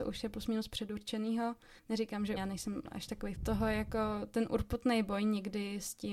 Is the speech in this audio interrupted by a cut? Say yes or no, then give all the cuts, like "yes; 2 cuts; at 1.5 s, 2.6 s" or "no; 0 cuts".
yes; 3 cuts; at 1.8 s, 2.4 s, 3.3 s